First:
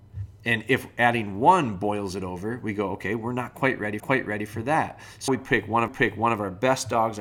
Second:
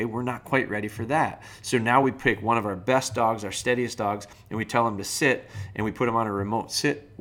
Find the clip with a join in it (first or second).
first